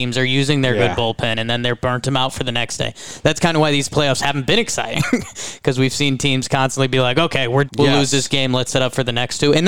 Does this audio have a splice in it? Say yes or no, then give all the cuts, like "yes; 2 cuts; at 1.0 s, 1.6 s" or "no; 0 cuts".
yes; 1 cut; at 7.7 s